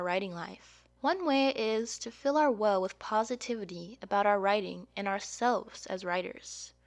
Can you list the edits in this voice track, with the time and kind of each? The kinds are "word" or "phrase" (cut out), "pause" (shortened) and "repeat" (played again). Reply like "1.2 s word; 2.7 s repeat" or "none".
0.9 s pause

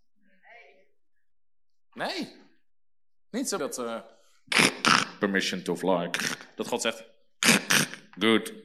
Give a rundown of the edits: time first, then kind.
3.6 s phrase

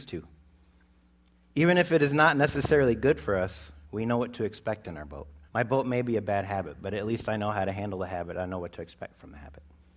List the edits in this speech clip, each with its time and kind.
3.8 s pause; 5.5 s pause

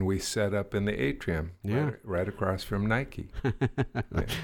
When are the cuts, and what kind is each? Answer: none

